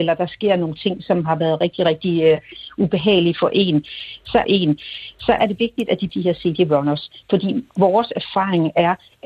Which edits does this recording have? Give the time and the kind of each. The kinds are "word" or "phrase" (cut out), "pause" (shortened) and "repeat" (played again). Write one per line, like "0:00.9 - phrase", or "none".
0:04.4 - repeat
0:06.1 - phrase